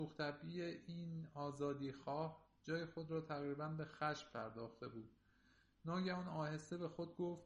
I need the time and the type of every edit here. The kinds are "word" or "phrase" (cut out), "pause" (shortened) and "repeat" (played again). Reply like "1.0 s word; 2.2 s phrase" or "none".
none